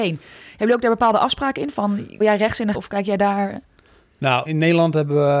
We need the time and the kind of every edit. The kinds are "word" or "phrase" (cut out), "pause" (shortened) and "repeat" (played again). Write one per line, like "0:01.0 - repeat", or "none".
0:02.2 - word
0:02.7 - word
0:04.5 - word